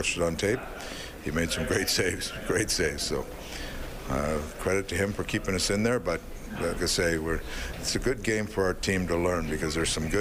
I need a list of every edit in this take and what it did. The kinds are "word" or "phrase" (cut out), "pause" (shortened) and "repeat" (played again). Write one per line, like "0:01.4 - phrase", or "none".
0:06.8 - word